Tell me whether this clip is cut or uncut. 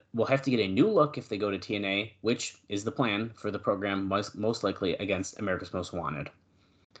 uncut